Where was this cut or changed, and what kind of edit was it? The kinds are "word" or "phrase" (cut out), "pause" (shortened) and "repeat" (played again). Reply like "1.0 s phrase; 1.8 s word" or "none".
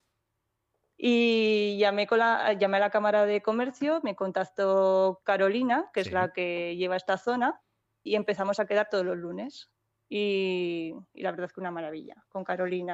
8.1 s word